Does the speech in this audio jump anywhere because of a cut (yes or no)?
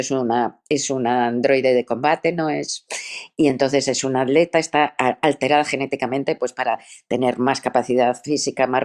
no